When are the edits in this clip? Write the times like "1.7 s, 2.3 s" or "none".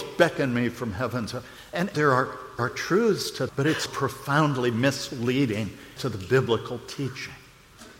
1.9 s, 2.6 s, 3.5 s, 3.9 s, 6.0 s